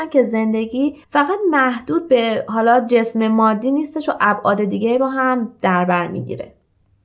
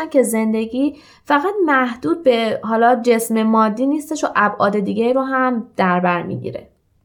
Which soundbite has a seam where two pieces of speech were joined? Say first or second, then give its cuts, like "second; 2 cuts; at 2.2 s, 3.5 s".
first; 1 cut; at 1.0 s